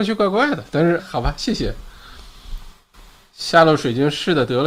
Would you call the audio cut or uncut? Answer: cut